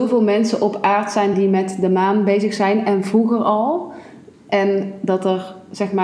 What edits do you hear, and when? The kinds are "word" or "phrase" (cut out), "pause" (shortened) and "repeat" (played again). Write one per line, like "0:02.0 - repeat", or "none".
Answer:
none